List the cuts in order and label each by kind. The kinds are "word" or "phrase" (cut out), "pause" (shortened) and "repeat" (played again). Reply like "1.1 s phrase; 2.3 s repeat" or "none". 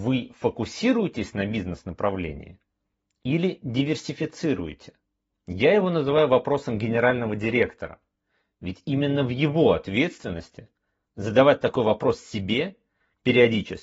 5.3 s pause